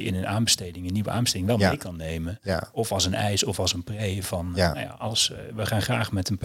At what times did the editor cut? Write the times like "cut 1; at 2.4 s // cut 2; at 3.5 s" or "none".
none